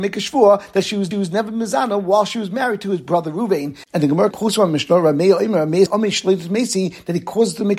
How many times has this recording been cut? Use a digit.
3